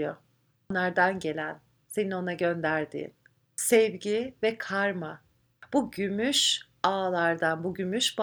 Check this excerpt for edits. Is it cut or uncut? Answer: uncut